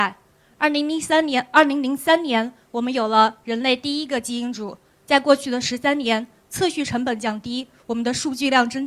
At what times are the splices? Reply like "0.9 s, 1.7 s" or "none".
none